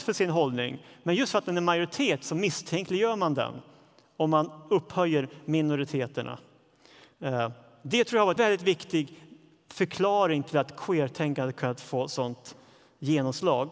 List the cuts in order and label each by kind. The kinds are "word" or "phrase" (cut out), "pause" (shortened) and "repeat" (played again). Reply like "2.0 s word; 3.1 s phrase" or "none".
8.4 s word